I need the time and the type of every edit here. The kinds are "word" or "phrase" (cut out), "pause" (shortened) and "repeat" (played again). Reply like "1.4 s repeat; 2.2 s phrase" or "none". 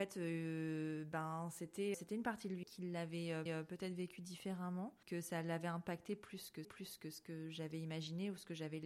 1.9 s word; 2.6 s word; 3.5 s repeat; 5.0 s pause; 6.6 s repeat